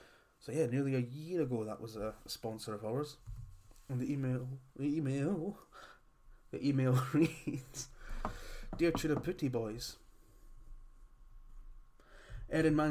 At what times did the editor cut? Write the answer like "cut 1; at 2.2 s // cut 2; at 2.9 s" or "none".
none